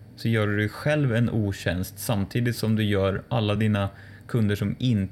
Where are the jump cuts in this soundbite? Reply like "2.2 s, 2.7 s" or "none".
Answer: none